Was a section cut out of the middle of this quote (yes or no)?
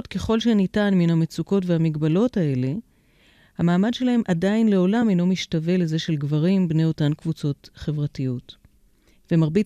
no